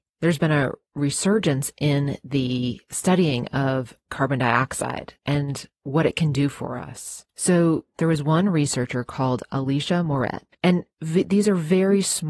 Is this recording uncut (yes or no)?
no